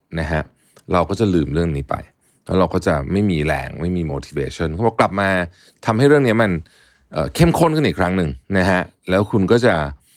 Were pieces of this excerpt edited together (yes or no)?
no